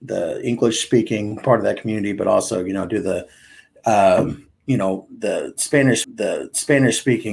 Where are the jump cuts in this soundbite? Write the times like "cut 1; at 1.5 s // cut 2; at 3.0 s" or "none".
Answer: cut 1; at 6.0 s